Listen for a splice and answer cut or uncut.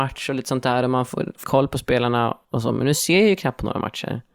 cut